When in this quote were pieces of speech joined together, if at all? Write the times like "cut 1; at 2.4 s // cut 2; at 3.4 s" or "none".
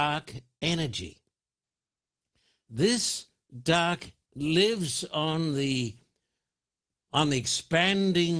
cut 1; at 4.3 s